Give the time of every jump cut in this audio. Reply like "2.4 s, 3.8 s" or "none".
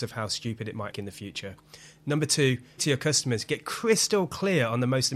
0.9 s, 2.8 s